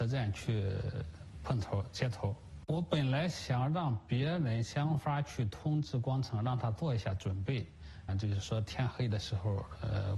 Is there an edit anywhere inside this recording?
yes; 1 cut; at 8.1 s

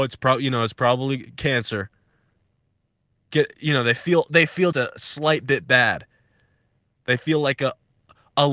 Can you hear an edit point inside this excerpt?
yes; 1 cut; at 4.7 s

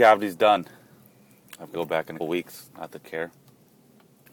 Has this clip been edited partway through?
yes; 3 cuts; at 1.7 s, 2.2 s, 3.0 s

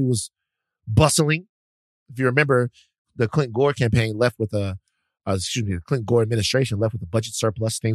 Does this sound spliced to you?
no; 0 cuts

